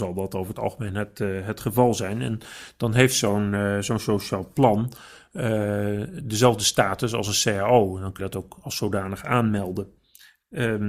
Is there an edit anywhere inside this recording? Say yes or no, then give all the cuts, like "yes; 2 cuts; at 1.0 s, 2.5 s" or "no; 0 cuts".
yes; 1 cut; at 8.2 s